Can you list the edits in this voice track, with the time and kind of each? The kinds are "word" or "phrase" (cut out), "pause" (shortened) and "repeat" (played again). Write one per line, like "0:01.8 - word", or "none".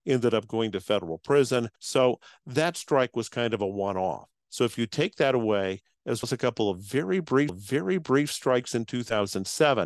0:01.8 - pause
0:06.2 - word
0:07.5 - repeat